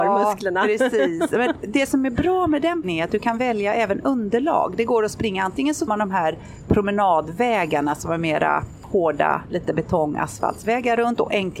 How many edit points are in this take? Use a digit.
2